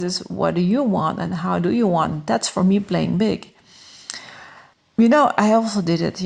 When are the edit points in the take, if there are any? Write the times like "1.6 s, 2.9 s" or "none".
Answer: 4.7 s